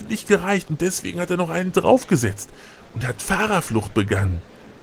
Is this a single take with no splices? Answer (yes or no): yes